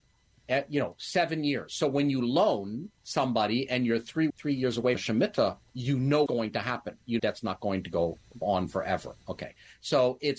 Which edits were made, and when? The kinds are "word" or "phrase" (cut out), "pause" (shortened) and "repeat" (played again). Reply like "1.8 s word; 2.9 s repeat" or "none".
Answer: 2.9 s pause; 4.3 s word; 4.9 s word; 5.6 s word; 6.3 s word; 7.2 s phrase; 8.4 s phrase